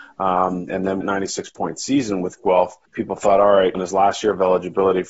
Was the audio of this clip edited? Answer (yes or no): yes